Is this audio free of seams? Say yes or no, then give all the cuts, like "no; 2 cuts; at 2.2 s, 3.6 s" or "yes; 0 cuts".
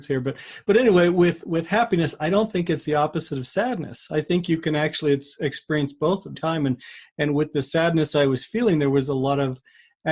no; 1 cut; at 6.3 s